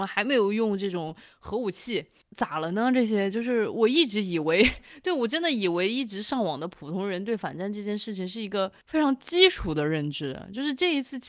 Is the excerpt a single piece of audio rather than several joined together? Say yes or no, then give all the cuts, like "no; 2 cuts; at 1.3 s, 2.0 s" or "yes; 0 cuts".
yes; 0 cuts